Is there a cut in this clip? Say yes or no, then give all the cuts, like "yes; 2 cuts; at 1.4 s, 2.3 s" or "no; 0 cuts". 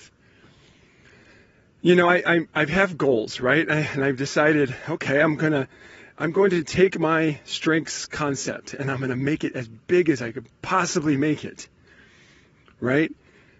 no; 0 cuts